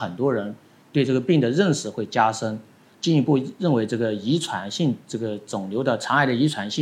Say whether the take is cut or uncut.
uncut